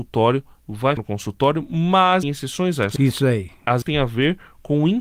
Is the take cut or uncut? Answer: cut